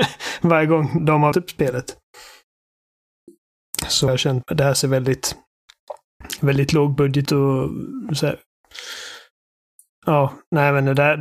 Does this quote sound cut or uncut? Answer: cut